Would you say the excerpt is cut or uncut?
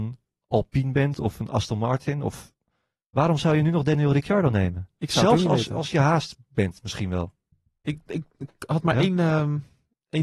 uncut